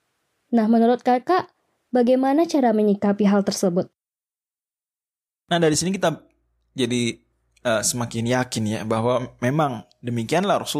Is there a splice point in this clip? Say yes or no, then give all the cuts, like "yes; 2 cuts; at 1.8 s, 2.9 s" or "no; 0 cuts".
no; 0 cuts